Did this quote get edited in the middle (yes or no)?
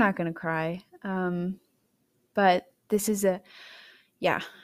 no